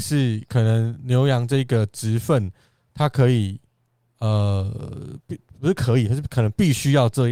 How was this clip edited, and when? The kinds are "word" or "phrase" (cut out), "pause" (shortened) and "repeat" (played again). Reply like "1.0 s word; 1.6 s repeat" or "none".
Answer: none